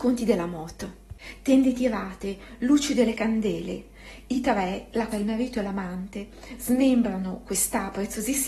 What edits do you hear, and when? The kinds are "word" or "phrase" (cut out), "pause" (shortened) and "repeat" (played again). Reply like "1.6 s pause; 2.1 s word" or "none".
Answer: 5.1 s word